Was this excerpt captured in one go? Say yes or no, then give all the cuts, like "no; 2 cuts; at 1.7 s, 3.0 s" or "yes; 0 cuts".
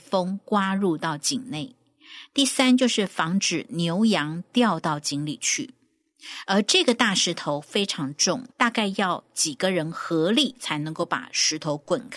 no; 1 cut; at 8.5 s